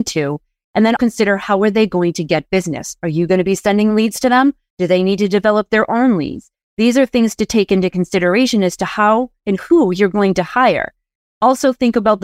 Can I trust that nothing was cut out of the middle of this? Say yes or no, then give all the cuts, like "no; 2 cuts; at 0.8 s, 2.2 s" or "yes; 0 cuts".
no; 1 cut; at 1.0 s